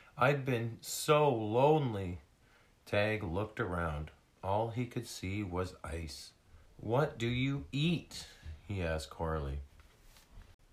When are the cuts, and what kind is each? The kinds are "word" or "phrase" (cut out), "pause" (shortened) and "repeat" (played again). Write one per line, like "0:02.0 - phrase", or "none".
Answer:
0:06.7 - pause